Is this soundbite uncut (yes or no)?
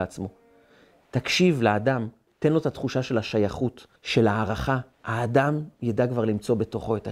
no